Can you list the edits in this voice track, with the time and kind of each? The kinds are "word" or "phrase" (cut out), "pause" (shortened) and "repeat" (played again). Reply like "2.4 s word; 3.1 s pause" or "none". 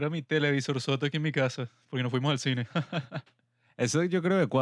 none